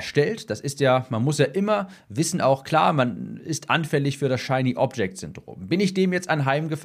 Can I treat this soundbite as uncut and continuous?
yes; 0 cuts

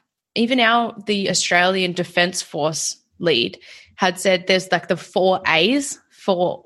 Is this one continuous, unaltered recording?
yes; 0 cuts

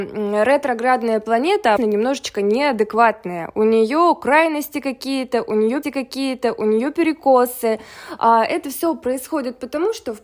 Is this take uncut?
no; 2 cuts; at 1.8 s, 5.8 s

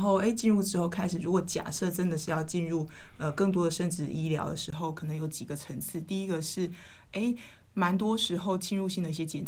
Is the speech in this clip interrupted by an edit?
no; 0 cuts

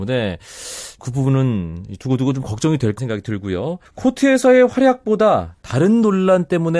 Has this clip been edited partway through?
yes; 3 cuts; at 1.0 s, 3.0 s, 3.9 s

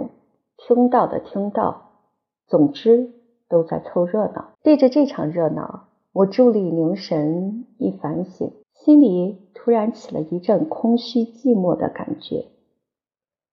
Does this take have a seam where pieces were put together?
yes; 2 cuts; at 4.5 s, 8.6 s

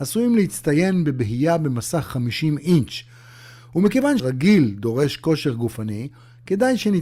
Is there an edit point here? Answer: yes; 1 cut; at 4.2 s

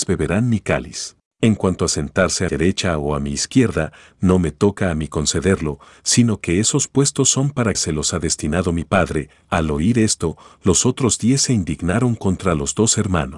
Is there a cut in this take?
yes; 3 cuts; at 1.3 s, 2.5 s, 7.7 s

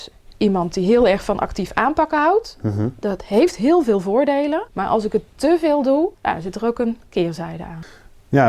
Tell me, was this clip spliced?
yes; 2 cuts; at 4.7 s, 6.1 s

